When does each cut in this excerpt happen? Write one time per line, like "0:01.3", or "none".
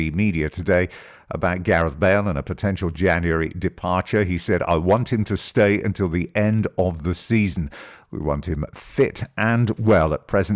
none

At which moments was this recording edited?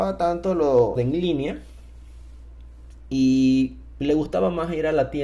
0:01.0

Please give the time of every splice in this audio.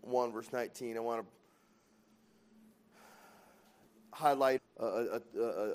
0:04.6

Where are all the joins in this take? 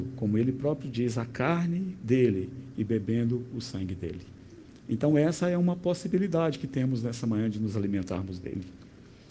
none

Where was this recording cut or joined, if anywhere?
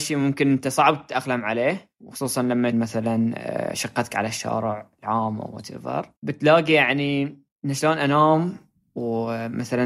0:02.7
0:06.2

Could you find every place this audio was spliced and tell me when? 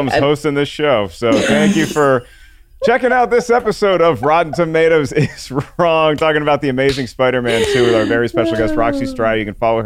none

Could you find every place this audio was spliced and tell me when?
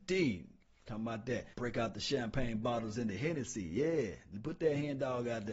0:01.5

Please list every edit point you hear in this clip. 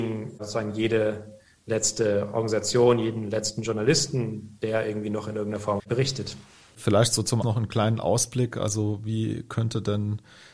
0:05.8
0:07.4

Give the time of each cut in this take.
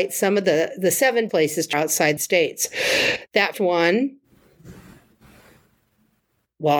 0:01.3
0:01.7
0:02.2
0:03.5

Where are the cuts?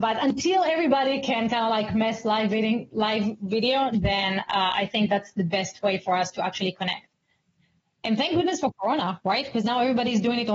none

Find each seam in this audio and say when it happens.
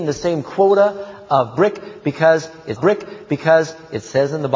0:02.8

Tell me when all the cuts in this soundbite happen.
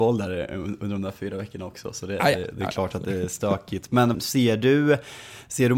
0:04.1

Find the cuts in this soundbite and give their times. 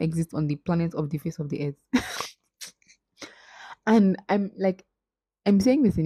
none

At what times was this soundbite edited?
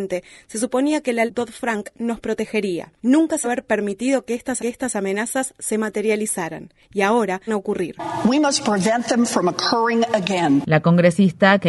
0:01.3
0:03.0
0:03.4
0:04.6
0:06.8
0:07.5

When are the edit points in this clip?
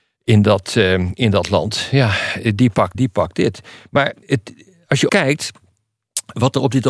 0:02.9
0:04.2
0:05.1

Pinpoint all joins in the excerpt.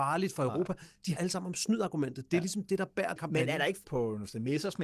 0:01.2
0:03.2
0:03.8

